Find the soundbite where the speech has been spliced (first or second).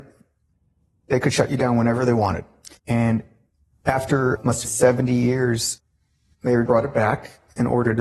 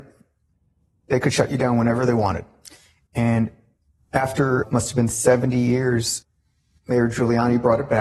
first